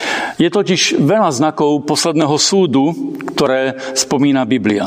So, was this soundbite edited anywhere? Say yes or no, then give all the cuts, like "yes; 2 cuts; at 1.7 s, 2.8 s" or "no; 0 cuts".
no; 0 cuts